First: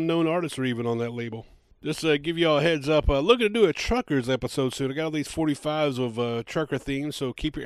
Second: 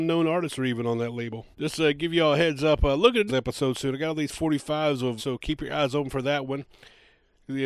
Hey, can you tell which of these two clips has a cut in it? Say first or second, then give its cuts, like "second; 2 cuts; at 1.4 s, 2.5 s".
second; 3 cuts; at 1.5 s, 3.3 s, 5.2 s